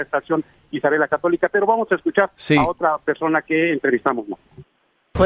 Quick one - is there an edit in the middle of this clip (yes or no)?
no